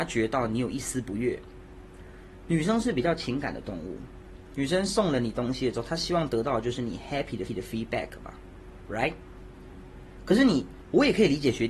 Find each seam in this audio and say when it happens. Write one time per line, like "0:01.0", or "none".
0:07.5